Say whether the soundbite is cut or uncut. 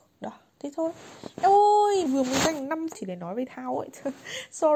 cut